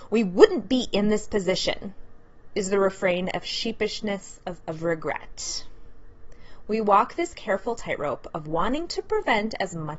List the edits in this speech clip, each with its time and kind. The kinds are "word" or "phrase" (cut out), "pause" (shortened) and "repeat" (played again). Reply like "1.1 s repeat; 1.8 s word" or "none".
4.6 s word